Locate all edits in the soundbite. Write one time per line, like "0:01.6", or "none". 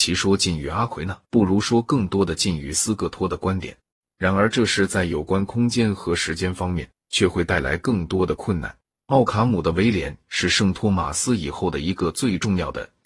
0:01.2
0:03.9
0:07.0
0:08.9